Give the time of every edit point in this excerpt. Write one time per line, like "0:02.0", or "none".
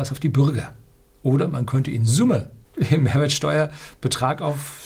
0:01.1
0:02.6